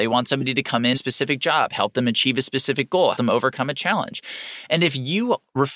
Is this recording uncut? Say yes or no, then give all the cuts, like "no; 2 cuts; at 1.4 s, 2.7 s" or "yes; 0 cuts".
no; 2 cuts; at 0.9 s, 3.1 s